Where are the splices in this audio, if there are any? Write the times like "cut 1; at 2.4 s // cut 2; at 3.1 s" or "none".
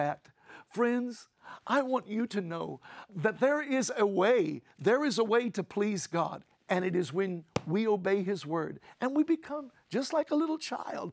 cut 1; at 3.1 s

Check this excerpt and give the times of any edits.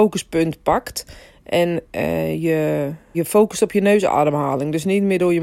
cut 1; at 1.8 s // cut 2; at 3.1 s

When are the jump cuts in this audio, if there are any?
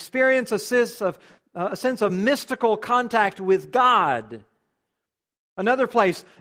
none

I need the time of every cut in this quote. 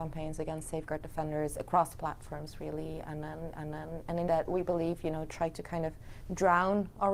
cut 1; at 3.5 s // cut 2; at 4.3 s

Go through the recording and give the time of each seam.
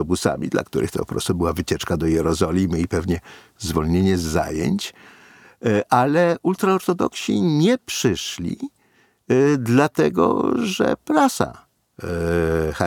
none

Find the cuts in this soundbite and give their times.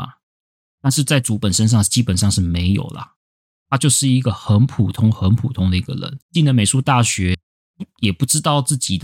cut 1; at 6.2 s

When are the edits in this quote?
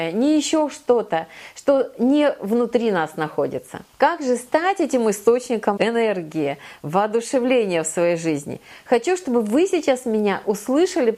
cut 1; at 5.8 s

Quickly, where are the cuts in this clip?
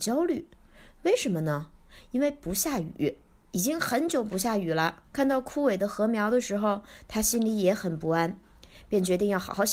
cut 1; at 5.1 s

